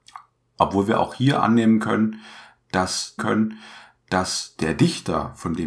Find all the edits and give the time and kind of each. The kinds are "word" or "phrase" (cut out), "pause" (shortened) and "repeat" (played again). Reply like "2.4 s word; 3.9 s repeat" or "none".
3.2 s repeat